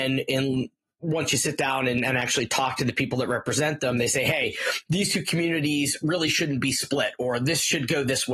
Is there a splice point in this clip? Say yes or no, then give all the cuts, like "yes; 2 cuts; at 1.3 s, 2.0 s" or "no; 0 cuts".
no; 0 cuts